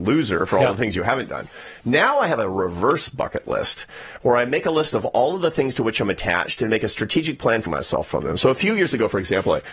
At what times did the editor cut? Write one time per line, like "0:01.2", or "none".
0:07.7